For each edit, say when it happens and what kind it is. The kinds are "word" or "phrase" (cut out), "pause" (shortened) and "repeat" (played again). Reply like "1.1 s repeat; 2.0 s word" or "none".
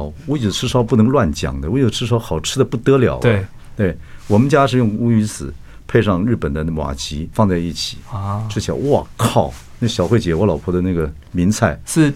7.3 s word